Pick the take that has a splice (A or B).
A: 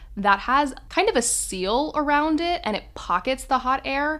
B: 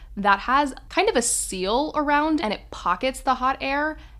B